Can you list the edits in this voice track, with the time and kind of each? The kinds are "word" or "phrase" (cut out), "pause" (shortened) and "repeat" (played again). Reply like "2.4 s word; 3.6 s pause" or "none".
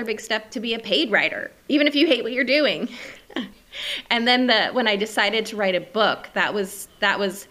1.6 s pause